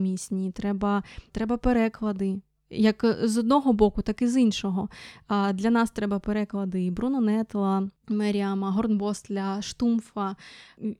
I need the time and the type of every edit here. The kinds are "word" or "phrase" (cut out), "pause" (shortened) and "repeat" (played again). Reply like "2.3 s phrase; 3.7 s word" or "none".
none

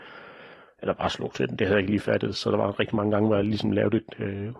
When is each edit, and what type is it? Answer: none

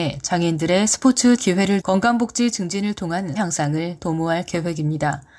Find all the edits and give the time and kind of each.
1.4 s word; 1.8 s word; 3.4 s phrase

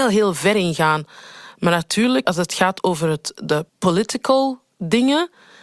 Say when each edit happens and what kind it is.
2.3 s word; 3.7 s pause

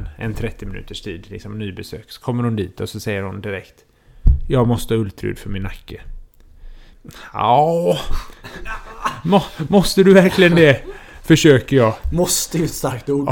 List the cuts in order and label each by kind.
none

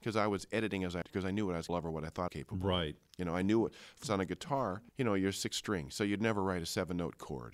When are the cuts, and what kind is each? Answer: 1.0 s word; 1.7 s word; 2.3 s phrase; 4.0 s word; 4.9 s pause

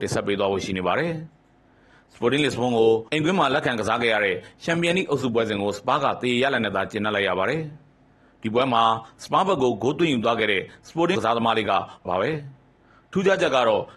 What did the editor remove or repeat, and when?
3.1 s pause; 11.1 s word; 12.0 s phrase

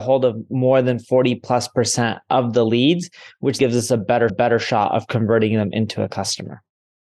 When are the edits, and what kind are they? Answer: 3.6 s word; 4.3 s repeat

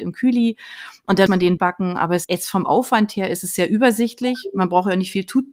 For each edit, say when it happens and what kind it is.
1.3 s word; 1.6 s word; 2.2 s word

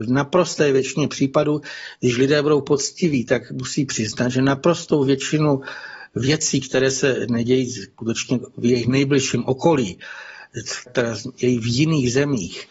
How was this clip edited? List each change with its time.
10.9 s phrase

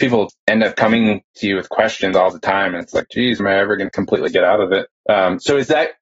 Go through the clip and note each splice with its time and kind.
3.4 s word

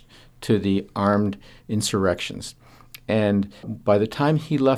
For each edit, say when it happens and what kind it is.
3.6 s word

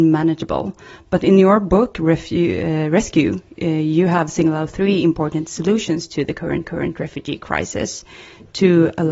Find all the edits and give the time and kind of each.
6.6 s repeat

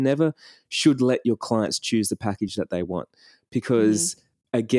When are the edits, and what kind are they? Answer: none

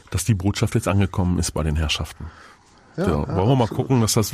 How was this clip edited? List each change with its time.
none

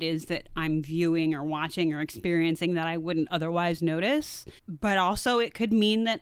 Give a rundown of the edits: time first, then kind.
4.6 s pause

